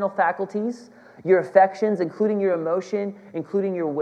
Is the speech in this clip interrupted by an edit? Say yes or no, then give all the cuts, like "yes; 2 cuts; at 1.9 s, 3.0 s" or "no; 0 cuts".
no; 0 cuts